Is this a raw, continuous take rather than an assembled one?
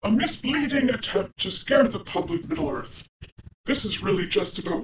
no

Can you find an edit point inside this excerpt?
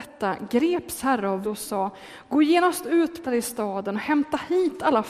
yes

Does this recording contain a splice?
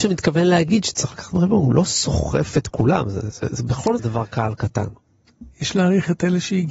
yes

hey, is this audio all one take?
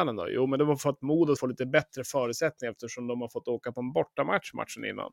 no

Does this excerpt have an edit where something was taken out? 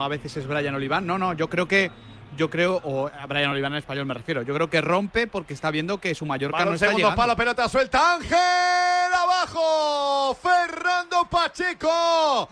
no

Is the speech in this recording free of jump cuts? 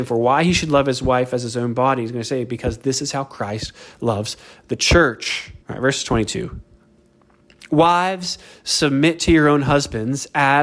no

